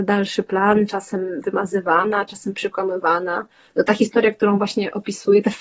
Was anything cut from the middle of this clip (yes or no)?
no